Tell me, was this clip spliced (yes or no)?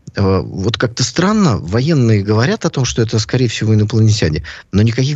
no